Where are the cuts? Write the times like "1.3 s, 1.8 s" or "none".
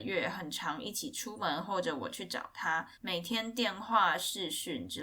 2.9 s